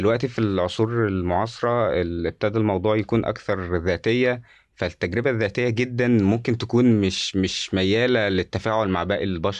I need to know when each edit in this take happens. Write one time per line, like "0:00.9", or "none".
none